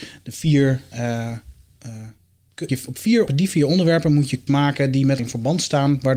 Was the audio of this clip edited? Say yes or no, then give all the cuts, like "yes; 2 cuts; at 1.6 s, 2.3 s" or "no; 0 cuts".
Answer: yes; 4 cuts; at 2.7 s, 3.3 s, 4.5 s, 5.2 s